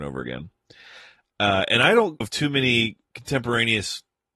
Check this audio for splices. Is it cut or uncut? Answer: cut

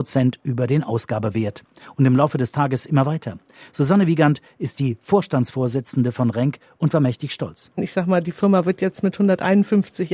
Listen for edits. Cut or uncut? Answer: uncut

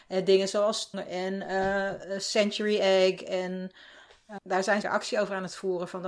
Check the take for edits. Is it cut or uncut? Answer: cut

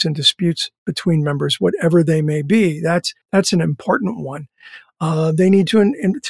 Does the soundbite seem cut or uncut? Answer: cut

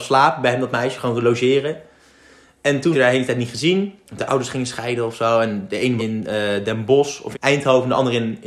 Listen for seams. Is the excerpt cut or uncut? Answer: cut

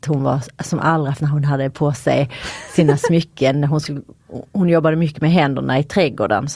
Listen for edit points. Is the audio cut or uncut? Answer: cut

